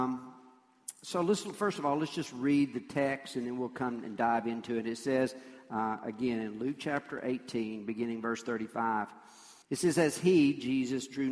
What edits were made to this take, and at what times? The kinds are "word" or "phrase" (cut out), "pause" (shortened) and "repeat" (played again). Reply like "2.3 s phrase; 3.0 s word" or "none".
9.6 s pause